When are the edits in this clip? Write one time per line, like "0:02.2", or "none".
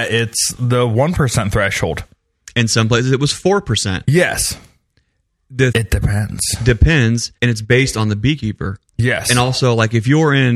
0:05.7
0:07.4
0:08.9